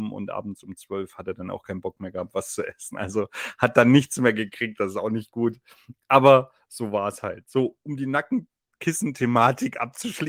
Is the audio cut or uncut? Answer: uncut